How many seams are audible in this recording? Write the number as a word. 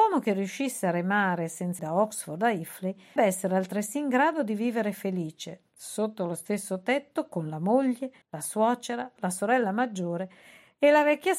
three